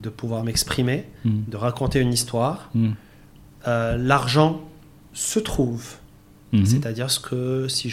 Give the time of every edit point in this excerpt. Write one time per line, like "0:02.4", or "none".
none